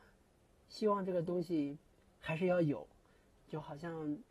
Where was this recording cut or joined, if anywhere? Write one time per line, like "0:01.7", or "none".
none